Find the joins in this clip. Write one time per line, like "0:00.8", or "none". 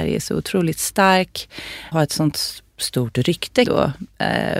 0:01.9
0:03.6